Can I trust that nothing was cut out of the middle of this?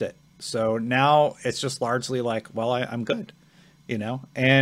yes; 0 cuts

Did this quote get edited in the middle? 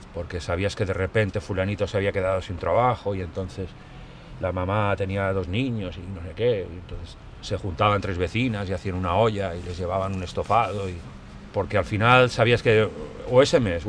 no; 0 cuts

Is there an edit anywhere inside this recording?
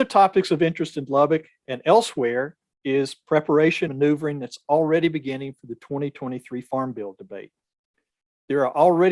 yes; 1 cut; at 3.9 s

